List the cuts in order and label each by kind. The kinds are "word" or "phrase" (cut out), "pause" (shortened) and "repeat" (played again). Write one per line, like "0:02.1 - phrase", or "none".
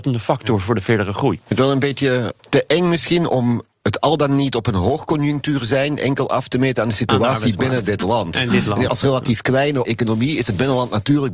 0:02.4 - word
0:08.9 - word
0:09.8 - word